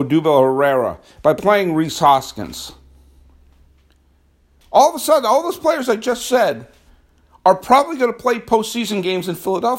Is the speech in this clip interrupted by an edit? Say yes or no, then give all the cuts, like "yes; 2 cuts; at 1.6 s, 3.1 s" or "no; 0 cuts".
no; 0 cuts